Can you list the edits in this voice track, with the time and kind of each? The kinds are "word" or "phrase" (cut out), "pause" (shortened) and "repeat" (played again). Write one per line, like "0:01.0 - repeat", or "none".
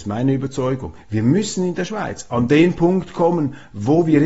none